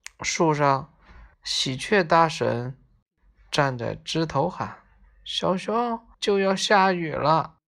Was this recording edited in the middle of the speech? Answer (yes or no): yes